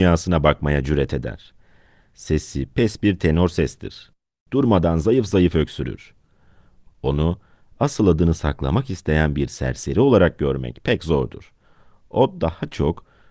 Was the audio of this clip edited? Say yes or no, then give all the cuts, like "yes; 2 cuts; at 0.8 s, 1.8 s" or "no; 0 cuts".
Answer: no; 0 cuts